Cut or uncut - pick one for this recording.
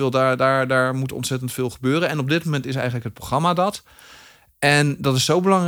uncut